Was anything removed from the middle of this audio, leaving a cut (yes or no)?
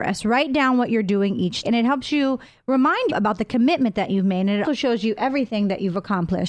yes